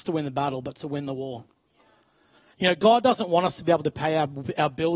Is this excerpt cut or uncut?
uncut